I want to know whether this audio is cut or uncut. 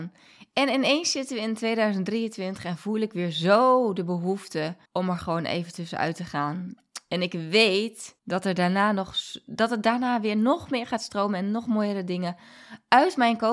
cut